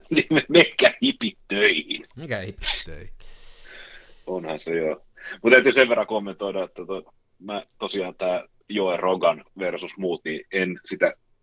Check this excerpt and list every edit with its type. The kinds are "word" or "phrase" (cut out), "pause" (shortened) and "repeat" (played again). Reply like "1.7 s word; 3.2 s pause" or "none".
none